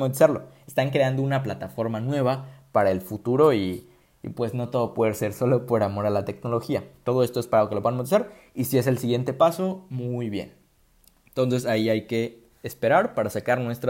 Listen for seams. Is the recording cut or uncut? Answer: uncut